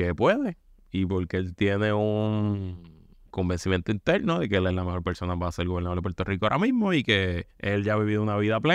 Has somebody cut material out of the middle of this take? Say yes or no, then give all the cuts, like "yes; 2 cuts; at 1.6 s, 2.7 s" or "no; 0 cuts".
yes; 2 cuts; at 3.3 s, 7.5 s